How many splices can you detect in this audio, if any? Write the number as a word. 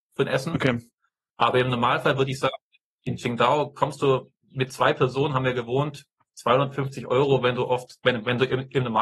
one